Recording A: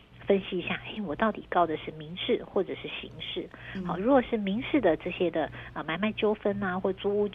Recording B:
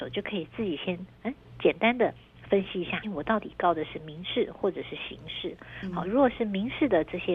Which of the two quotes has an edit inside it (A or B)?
B